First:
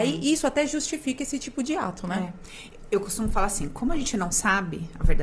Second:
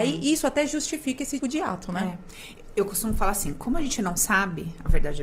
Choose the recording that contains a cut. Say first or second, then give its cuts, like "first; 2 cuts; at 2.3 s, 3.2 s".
second; 1 cut; at 1.4 s